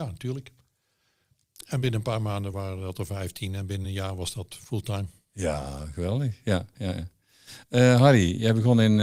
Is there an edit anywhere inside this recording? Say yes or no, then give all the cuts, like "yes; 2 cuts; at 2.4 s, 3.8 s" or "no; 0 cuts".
no; 0 cuts